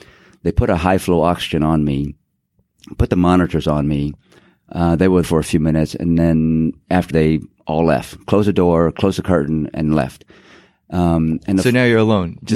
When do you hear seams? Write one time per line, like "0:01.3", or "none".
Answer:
0:05.2
0:07.1